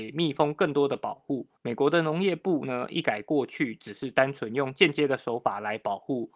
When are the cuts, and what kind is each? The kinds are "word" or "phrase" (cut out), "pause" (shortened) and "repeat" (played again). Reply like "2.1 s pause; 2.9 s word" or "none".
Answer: 1.6 s pause